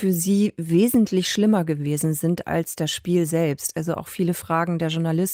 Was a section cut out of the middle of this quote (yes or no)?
no